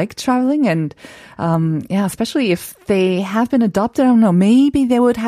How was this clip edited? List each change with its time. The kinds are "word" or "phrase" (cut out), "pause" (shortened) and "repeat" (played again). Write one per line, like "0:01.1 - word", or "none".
none